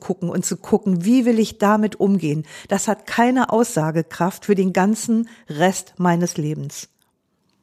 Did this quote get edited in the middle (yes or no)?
no